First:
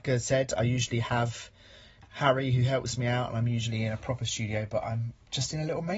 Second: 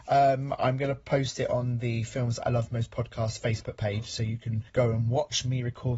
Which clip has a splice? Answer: second; 1 cut; at 4.7 s

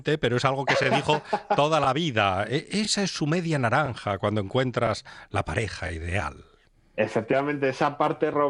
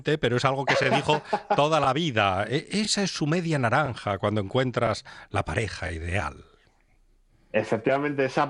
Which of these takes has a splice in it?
first; 1 cut; at 6.7 s

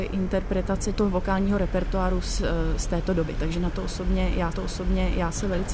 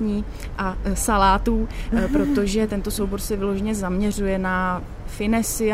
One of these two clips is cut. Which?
first; 1 cut; at 4.5 s

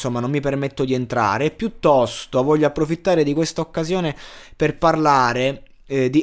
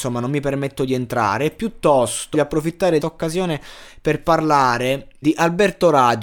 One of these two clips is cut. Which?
second; 3 cuts; at 2.3 s, 3.0 s, 5.2 s

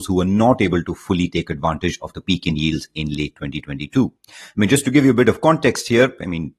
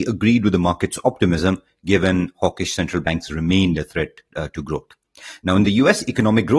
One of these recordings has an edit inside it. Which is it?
first; 1 cut; at 4.2 s

